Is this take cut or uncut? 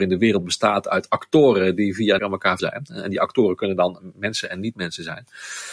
cut